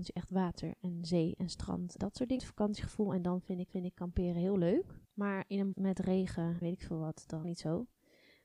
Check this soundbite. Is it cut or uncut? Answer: cut